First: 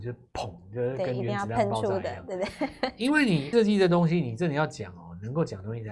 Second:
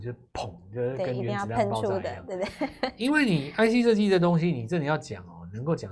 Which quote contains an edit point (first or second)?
first